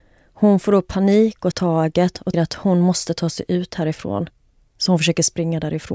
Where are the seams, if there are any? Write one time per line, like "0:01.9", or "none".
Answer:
0:01.5
0:02.3